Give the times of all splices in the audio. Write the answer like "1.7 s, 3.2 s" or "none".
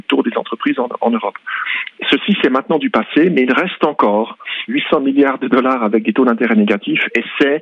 4.7 s